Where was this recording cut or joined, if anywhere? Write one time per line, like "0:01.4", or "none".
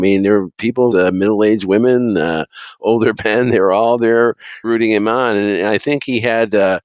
0:00.9
0:04.6